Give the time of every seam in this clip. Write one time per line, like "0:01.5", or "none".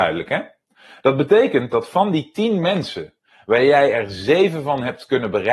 none